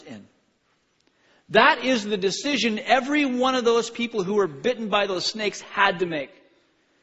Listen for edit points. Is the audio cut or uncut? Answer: uncut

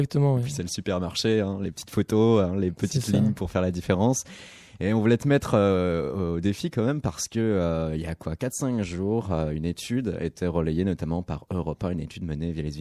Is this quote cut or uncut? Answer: uncut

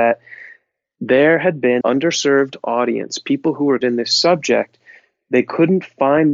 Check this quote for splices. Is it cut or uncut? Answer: cut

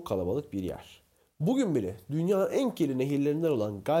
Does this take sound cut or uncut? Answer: uncut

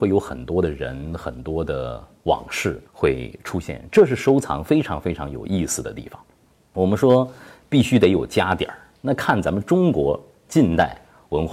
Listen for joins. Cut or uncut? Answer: cut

